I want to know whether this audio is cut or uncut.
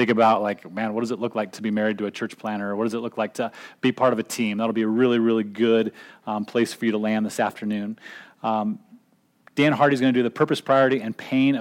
uncut